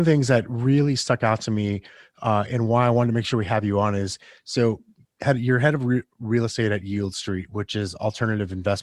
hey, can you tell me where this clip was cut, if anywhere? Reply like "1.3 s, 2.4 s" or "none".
none